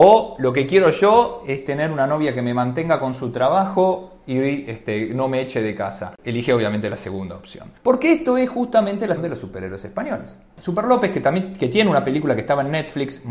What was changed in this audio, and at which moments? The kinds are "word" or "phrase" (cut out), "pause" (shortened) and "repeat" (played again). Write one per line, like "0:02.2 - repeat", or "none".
0:07.8 - pause
0:09.2 - word